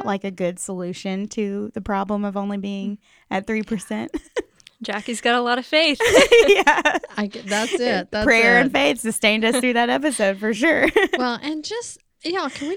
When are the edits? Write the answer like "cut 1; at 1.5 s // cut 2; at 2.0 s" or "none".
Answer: none